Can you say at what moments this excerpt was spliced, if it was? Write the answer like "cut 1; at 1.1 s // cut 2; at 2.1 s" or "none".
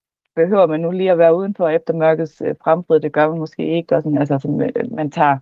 none